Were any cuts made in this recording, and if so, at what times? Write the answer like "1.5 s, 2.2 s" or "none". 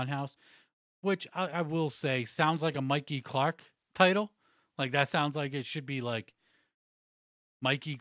none